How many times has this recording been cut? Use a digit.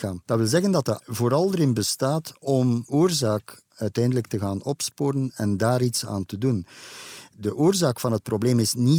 2